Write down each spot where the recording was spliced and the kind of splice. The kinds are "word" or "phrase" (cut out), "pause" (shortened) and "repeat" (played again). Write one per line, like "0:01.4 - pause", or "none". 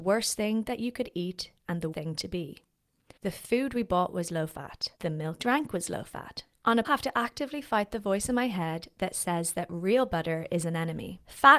0:01.9 - word
0:03.2 - pause
0:05.0 - pause
0:05.4 - word
0:06.5 - pause
0:06.8 - phrase

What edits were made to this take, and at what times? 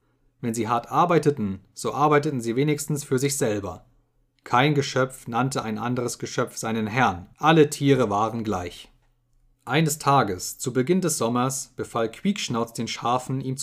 0:07.3 - pause

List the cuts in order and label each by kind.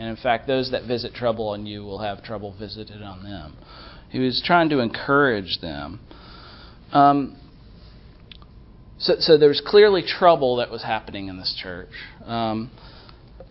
none

